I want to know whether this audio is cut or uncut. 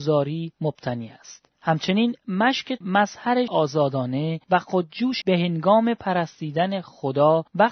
cut